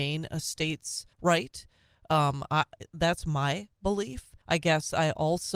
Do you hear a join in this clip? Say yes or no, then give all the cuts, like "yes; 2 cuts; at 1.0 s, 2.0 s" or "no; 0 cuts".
yes; 2 cuts; at 1.1 s, 4.4 s